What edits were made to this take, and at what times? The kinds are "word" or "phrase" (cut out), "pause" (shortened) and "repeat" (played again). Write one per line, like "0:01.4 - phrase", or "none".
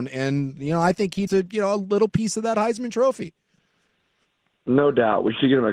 0:01.3 - word